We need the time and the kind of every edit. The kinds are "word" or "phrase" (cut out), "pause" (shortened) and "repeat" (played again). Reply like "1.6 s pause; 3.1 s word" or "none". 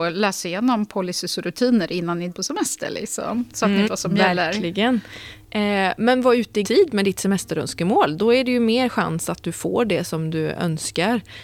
2.3 s word; 3.8 s word; 6.6 s word